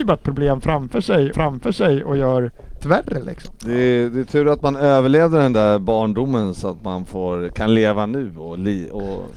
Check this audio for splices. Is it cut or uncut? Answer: cut